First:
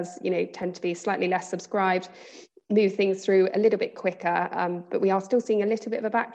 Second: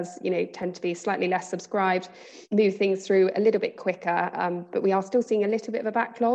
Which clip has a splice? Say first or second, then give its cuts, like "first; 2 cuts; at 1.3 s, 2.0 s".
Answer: second; 1 cut; at 2.5 s